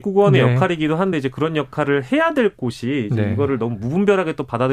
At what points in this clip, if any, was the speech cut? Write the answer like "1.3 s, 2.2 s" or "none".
none